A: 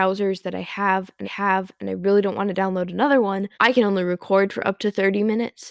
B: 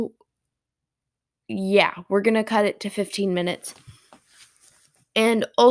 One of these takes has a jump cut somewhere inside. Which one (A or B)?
A